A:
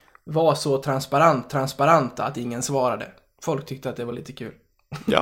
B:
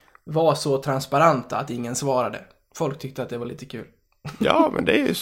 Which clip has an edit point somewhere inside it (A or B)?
A